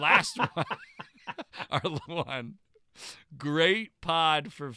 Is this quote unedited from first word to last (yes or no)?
no